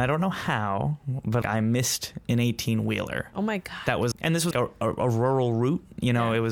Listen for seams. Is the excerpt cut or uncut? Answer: cut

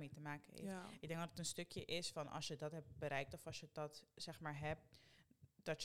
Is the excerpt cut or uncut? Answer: uncut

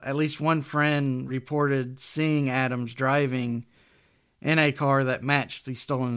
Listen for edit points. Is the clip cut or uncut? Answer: uncut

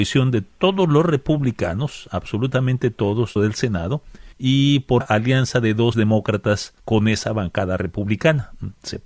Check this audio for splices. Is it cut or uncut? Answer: cut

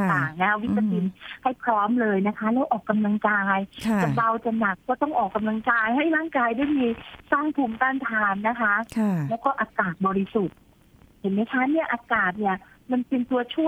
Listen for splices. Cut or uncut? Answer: uncut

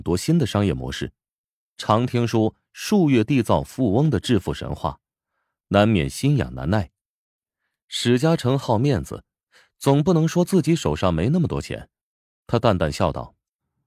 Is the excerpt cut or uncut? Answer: uncut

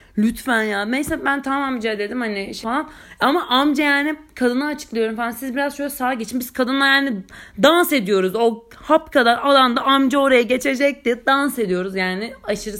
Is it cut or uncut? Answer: cut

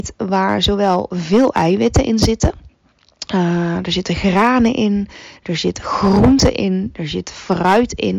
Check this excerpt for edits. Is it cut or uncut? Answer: uncut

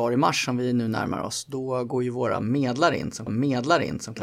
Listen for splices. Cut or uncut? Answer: cut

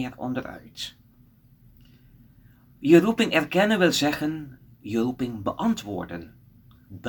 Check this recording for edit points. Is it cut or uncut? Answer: uncut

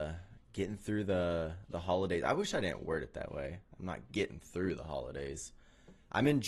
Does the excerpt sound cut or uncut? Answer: uncut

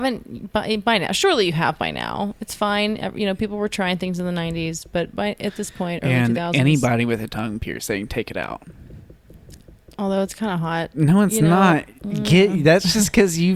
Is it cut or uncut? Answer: uncut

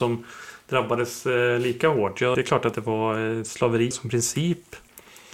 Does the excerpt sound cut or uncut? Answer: cut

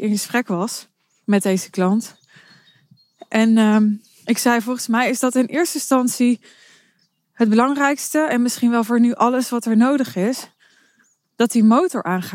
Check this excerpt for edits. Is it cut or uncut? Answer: uncut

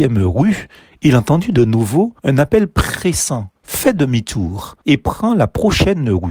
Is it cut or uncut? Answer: cut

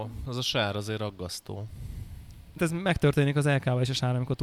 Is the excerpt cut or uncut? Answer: cut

